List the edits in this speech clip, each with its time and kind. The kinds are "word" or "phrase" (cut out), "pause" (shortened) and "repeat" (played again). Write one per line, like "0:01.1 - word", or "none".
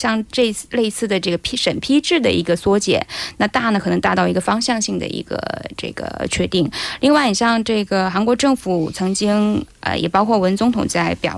none